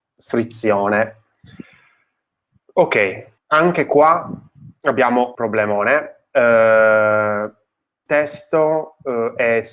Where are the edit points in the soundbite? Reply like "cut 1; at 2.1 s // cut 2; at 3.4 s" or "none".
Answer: cut 1; at 3.4 s // cut 2; at 5.3 s // cut 3; at 8.1 s